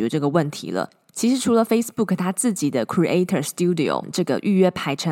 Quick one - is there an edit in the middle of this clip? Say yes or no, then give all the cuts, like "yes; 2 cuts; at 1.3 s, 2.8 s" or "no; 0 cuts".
no; 0 cuts